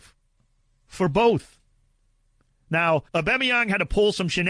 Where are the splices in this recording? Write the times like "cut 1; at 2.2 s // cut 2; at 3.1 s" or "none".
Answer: cut 1; at 3.1 s

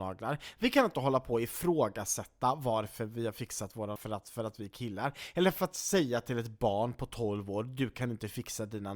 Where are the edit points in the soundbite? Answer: cut 1; at 4.0 s

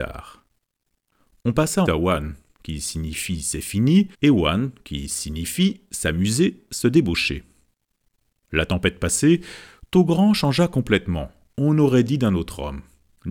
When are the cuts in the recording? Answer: cut 1; at 1.9 s // cut 2; at 4.1 s

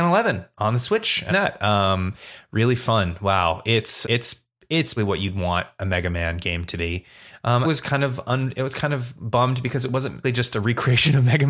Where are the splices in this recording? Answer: cut 1; at 1.3 s // cut 2; at 4.0 s // cut 3; at 5.0 s // cut 4; at 7.6 s // cut 5; at 10.2 s

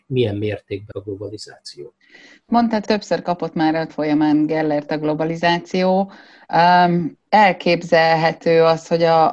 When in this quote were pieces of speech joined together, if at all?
cut 1; at 0.9 s // cut 2; at 2.9 s // cut 3; at 3.9 s

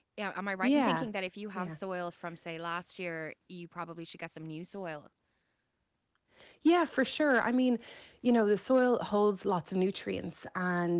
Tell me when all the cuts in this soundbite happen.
none

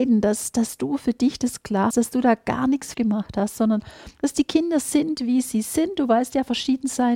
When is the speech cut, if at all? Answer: cut 1; at 1.9 s // cut 2; at 2.9 s // cut 3; at 4.1 s

